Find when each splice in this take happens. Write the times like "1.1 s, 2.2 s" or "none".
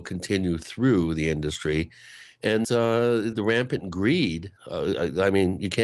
2.6 s, 3.3 s, 4.6 s